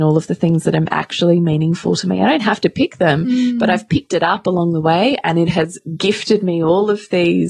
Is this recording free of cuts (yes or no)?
yes